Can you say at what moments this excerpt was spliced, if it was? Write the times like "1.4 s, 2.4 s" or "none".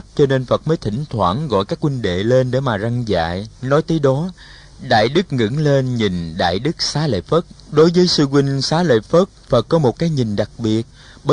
3.6 s, 7.6 s, 9.4 s